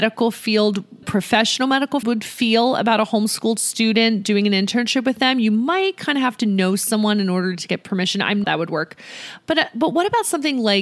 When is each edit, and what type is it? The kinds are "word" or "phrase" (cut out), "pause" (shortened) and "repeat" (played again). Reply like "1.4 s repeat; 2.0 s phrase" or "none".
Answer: 1.0 s word; 2.0 s word; 8.4 s phrase